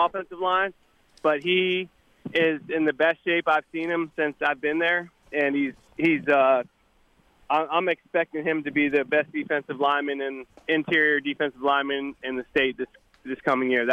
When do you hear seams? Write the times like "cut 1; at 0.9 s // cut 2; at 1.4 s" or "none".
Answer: none